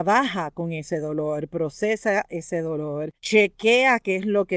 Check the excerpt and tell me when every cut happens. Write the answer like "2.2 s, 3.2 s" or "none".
3.1 s